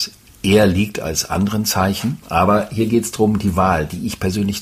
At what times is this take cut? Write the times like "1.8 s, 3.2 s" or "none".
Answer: 2.2 s